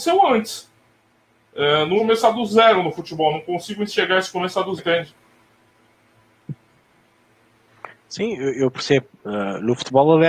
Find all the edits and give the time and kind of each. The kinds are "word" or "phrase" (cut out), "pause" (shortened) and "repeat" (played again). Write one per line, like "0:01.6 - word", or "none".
0:02.0 - word
0:04.8 - word